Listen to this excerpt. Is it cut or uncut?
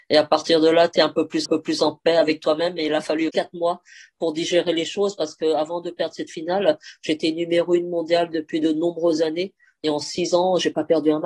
cut